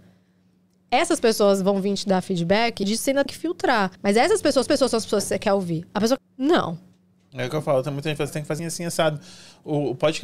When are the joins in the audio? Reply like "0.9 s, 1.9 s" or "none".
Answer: 2.8 s, 3.3 s, 4.0 s, 4.7 s, 6.2 s, 8.3 s, 8.6 s